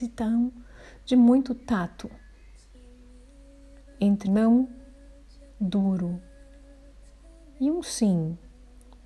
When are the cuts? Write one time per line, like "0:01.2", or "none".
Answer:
0:04.3

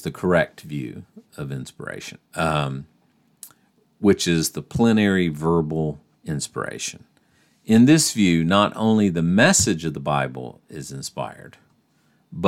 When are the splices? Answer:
0:02.2
0:06.1

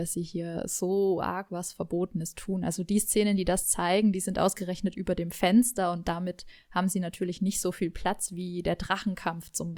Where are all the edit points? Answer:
none

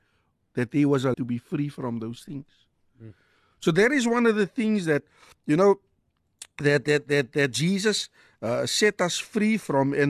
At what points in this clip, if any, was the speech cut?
0:01.1

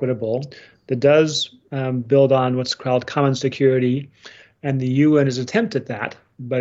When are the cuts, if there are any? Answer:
none

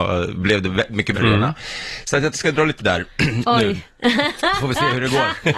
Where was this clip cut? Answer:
0:01.1
0:02.3
0:02.8

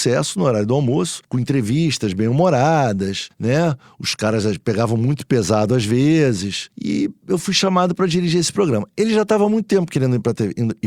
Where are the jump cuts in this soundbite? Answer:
none

